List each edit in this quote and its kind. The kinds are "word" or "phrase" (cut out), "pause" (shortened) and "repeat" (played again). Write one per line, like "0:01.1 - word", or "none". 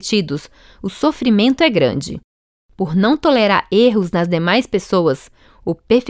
none